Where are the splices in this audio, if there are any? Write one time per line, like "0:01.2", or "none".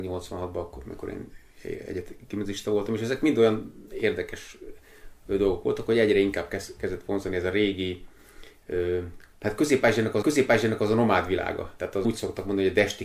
0:10.2
0:12.0